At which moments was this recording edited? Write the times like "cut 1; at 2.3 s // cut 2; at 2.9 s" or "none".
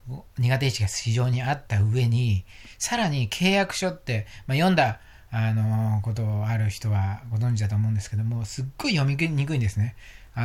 none